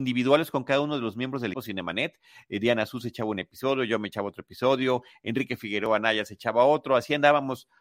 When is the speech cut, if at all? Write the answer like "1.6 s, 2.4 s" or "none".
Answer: 1.5 s